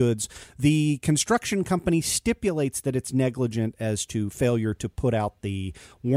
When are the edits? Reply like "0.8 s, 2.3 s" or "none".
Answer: none